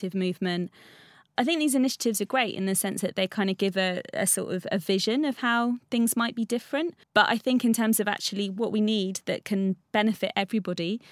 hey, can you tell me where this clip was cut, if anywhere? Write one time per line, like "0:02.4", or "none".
0:07.0